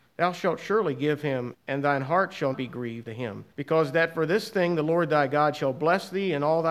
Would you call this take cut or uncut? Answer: cut